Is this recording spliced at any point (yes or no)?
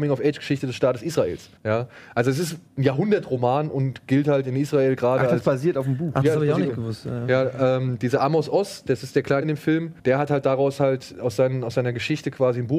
yes